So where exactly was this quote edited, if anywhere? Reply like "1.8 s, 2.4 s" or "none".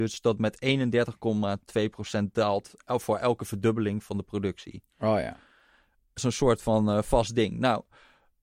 6.2 s